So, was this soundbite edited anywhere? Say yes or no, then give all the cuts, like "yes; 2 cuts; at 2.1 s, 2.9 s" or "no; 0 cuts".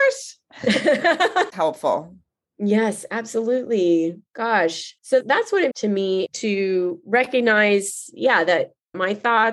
yes; 3 cuts; at 1.5 s, 5.0 s, 5.7 s